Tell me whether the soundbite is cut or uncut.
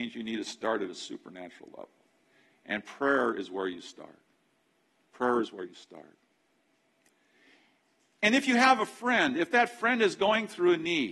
uncut